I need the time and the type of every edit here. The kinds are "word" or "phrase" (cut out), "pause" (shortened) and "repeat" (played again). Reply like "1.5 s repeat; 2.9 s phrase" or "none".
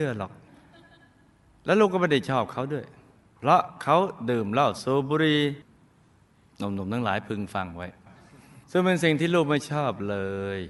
3.1 s pause; 8.6 s pause